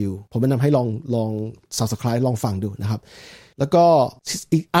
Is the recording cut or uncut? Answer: uncut